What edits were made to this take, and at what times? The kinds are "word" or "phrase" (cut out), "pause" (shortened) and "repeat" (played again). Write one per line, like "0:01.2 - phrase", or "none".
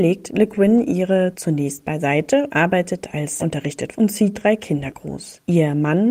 0:01.3 - word
0:02.5 - word
0:03.4 - word
0:03.9 - word
0:04.3 - word